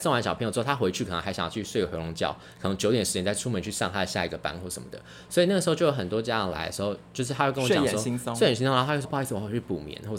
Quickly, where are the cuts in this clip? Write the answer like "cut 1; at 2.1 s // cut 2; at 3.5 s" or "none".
cut 1; at 9.0 s